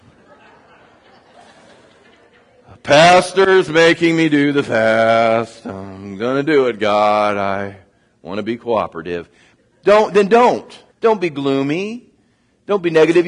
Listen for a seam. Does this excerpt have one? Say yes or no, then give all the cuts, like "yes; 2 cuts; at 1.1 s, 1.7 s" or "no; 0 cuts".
yes; 1 cut; at 10.9 s